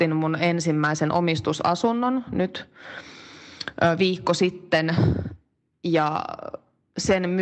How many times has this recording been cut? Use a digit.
0